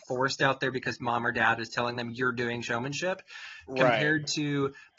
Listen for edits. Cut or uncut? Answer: uncut